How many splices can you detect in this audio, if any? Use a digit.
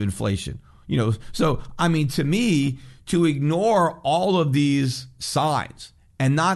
0